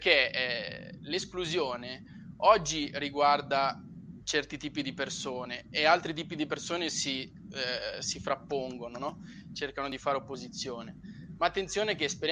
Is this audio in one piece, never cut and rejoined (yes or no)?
yes